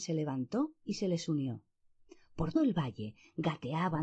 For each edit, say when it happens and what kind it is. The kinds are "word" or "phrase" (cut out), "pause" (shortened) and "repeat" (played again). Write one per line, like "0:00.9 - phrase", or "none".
0:02.6 - word